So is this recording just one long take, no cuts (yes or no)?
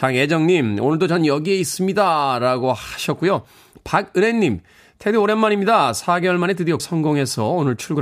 no